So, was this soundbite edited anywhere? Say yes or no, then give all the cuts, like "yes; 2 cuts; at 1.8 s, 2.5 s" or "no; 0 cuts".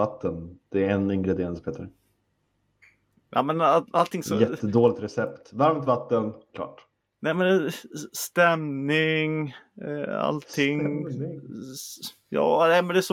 no; 0 cuts